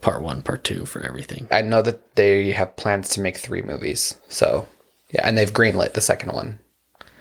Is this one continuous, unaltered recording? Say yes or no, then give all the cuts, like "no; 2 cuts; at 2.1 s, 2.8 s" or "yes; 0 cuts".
no; 1 cut; at 4.2 s